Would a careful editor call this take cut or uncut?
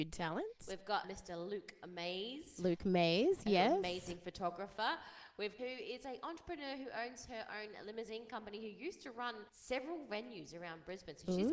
cut